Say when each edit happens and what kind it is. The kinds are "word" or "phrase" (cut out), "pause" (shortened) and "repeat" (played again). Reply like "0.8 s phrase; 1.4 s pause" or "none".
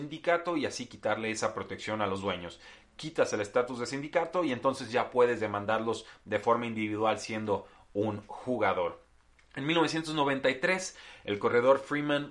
none

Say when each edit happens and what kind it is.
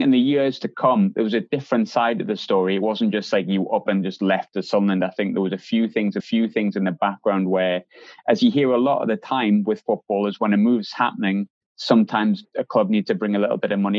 6.2 s repeat; 11.6 s pause

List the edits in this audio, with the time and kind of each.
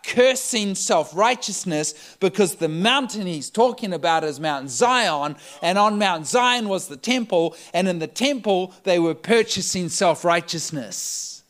none

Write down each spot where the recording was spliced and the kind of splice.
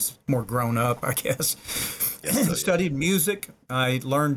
2.2 s word

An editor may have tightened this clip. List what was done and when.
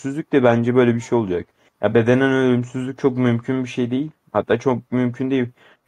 none

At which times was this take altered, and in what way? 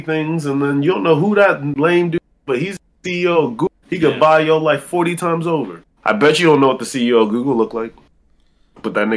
3.8 s pause; 5.9 s pause

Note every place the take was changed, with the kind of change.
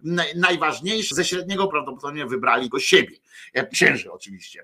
1.1 s word; 1.7 s word; 2.7 s word; 3.7 s word

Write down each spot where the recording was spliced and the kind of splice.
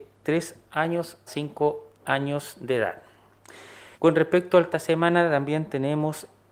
1.3 s word; 3.9 s pause; 4.7 s phrase

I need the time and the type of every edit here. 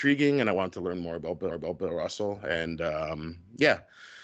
1.5 s repeat

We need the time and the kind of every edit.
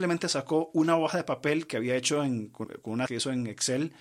2.6 s word; 3.1 s word

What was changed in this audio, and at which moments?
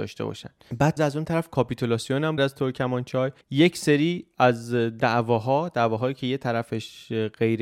1.0 s word; 2.4 s phrase; 3.4 s pause

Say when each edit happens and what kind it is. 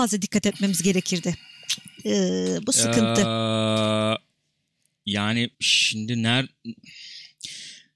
5.5 s pause

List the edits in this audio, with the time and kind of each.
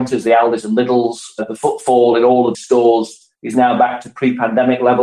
2.5 s word; 3.3 s pause

